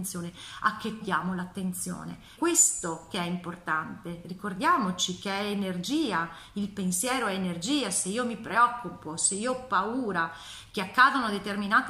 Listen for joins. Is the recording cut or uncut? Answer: cut